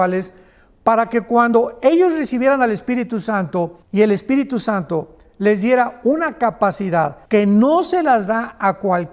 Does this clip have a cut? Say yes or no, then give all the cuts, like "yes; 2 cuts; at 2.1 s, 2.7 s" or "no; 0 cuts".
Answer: yes; 2 cuts; at 3.8 s, 7.3 s